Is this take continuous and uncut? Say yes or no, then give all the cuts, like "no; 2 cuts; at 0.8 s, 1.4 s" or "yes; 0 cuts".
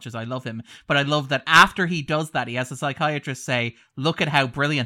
yes; 0 cuts